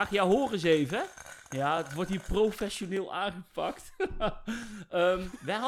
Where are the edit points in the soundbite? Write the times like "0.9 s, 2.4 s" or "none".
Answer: none